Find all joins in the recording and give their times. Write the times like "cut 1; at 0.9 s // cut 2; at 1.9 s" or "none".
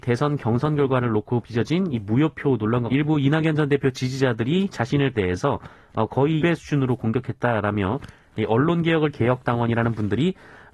cut 1; at 2.9 s // cut 2; at 5.1 s // cut 3; at 6.4 s // cut 4; at 9.1 s